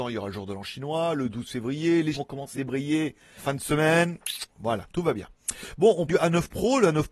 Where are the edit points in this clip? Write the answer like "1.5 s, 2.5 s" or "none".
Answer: 2.1 s, 2.5 s, 3.4 s, 6.1 s